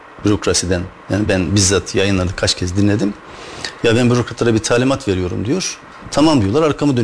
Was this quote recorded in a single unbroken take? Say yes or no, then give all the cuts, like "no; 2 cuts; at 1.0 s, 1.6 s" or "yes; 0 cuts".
yes; 0 cuts